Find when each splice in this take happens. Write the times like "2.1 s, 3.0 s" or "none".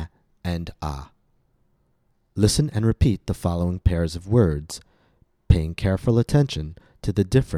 none